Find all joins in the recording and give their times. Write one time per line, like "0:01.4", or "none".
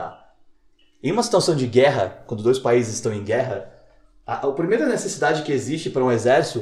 none